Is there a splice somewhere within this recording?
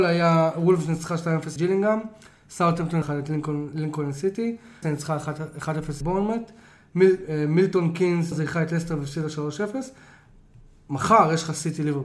yes; 5 cuts; at 1.6 s, 3.0 s, 4.8 s, 6.0 s, 8.3 s

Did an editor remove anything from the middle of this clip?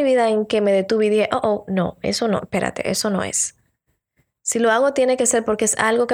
no; 0 cuts

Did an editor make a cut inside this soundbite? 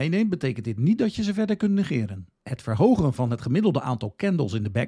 yes; 1 cut; at 2.3 s

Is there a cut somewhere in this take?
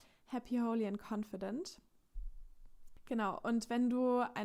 no; 0 cuts

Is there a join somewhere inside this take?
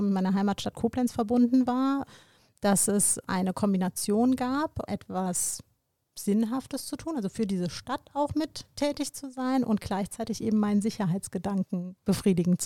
no; 0 cuts

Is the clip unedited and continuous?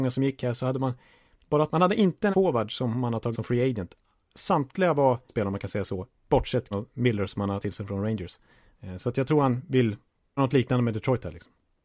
no; 7 cuts; at 1.7 s, 2.3 s, 3.3 s, 5.3 s, 6.7 s, 7.6 s, 10.4 s

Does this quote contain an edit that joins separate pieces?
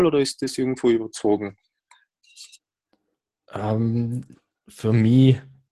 no; 0 cuts

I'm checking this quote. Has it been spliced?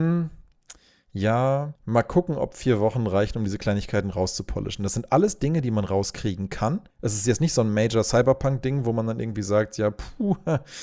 yes; 2 cuts; at 1.8 s, 6.9 s

